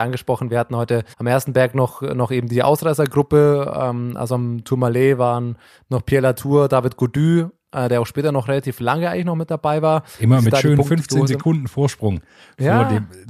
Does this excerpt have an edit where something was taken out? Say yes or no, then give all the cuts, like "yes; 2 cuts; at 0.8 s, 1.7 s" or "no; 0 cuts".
yes; 1 cut; at 1.1 s